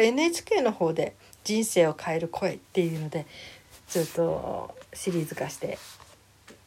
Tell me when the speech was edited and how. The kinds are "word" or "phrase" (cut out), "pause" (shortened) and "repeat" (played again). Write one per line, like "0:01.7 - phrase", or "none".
0:02.6 - pause